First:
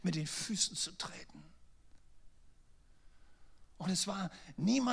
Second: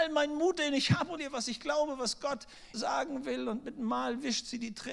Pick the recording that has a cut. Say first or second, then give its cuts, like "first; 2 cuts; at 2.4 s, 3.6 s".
second; 2 cuts; at 1.2 s, 2.7 s